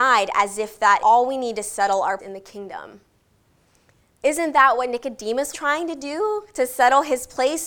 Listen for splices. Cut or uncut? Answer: cut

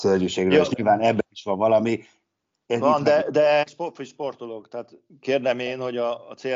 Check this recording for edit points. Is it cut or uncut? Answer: cut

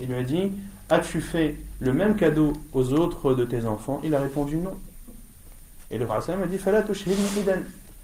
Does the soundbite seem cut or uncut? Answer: cut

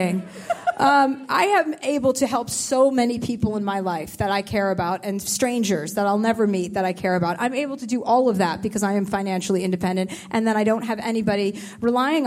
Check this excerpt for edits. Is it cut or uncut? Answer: uncut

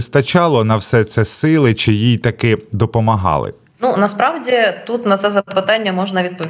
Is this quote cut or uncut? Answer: uncut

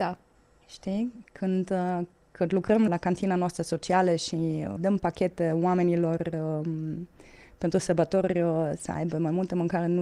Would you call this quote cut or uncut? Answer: cut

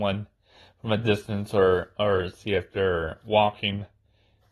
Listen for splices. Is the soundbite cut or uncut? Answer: uncut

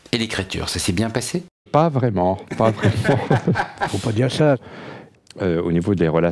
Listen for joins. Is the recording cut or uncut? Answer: cut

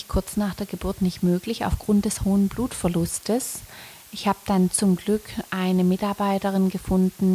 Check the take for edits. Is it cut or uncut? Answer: uncut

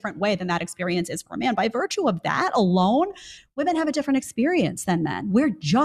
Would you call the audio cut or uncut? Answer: uncut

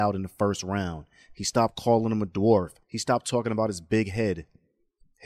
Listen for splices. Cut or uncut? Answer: cut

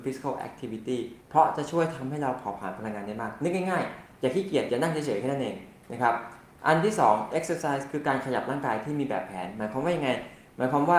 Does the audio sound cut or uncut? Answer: cut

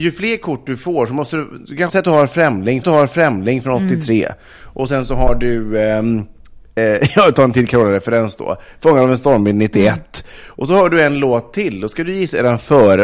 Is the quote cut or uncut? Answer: cut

